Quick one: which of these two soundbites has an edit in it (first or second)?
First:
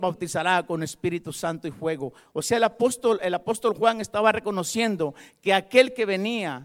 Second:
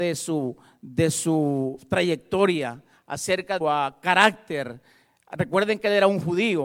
second